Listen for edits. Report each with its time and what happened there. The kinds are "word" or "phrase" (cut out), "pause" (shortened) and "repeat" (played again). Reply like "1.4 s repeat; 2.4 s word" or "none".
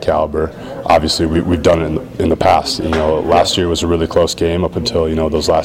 none